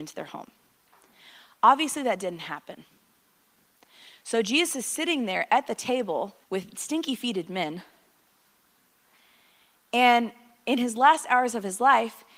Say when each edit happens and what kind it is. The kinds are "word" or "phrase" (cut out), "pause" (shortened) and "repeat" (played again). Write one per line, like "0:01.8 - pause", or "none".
0:06.4 - pause